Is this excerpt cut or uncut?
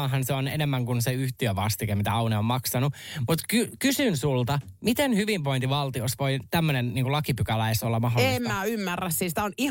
uncut